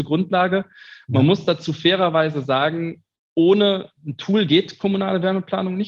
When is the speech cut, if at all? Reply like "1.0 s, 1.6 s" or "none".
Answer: none